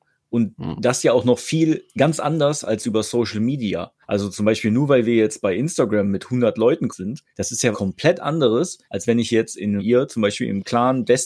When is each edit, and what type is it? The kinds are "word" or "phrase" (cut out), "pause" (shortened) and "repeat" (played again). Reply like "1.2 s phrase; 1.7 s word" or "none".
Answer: 4.0 s pause; 6.9 s word; 7.3 s pause; 7.7 s word; 8.8 s pause; 9.8 s phrase